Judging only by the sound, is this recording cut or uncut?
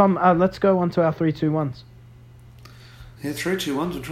cut